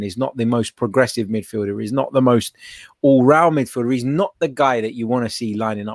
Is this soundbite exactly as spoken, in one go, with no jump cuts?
yes; 0 cuts

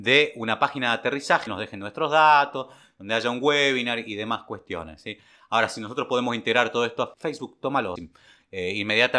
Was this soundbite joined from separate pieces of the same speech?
yes; 3 cuts; at 1.5 s, 7.1 s, 8.0 s

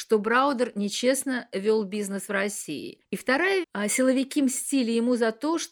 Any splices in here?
yes; 2 cuts; at 3.0 s, 3.6 s

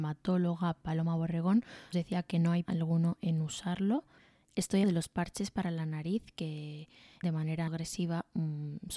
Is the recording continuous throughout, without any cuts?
no; 5 cuts; at 1.9 s, 2.6 s, 4.8 s, 7.2 s, 7.7 s

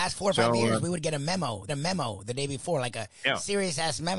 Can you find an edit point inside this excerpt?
yes; 1 cut; at 1.7 s

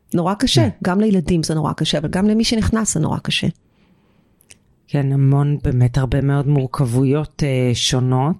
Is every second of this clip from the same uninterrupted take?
yes; 0 cuts

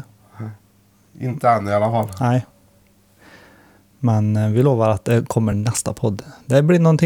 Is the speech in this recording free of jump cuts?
yes; 0 cuts

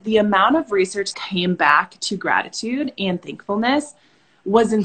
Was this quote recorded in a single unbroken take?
no; 1 cut; at 1.1 s

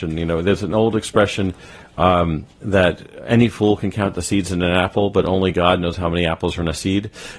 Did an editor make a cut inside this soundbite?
no; 0 cuts

